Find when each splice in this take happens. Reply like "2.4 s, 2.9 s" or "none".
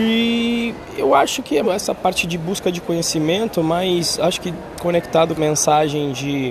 1.6 s, 5.4 s